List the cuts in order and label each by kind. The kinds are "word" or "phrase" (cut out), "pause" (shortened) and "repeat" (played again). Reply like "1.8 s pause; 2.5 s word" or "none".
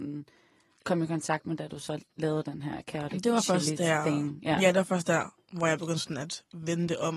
2.1 s pause